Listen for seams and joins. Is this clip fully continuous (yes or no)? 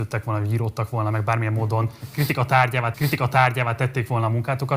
no